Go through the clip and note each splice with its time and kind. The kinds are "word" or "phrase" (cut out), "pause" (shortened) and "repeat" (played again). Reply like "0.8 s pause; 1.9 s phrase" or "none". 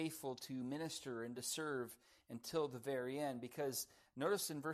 none